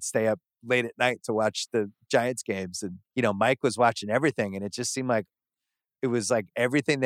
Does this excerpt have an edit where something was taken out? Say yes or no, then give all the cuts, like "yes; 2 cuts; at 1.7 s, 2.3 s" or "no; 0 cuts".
yes; 1 cut; at 3.0 s